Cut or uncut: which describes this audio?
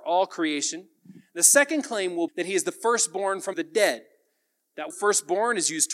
cut